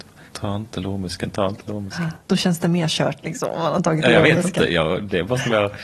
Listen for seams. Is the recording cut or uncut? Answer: cut